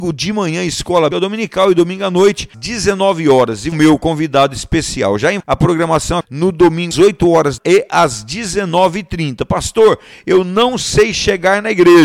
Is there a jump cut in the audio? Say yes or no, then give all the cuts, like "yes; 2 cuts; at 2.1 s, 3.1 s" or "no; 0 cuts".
yes; 7 cuts; at 1.1 s, 2.5 s, 3.7 s, 5.4 s, 6.2 s, 6.9 s, 7.6 s